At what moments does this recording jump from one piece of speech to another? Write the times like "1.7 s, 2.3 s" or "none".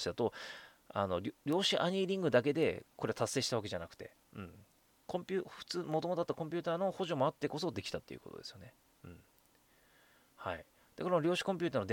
none